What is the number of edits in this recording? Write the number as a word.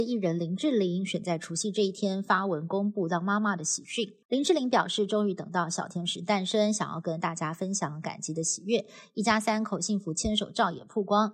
one